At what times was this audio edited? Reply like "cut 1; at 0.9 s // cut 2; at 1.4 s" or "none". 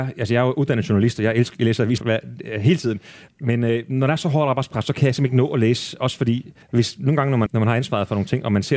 cut 1; at 2.0 s // cut 2; at 3.3 s // cut 3; at 6.6 s // cut 4; at 7.5 s